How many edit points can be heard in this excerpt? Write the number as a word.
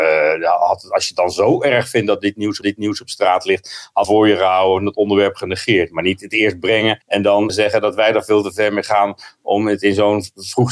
four